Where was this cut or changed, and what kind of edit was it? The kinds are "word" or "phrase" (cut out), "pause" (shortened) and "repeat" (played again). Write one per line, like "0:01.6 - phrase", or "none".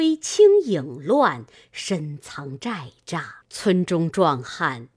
0:03.4 - pause